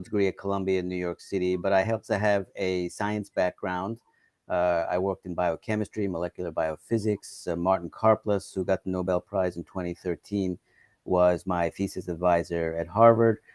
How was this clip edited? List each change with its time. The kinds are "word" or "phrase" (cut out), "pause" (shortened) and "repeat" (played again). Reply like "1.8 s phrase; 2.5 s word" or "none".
none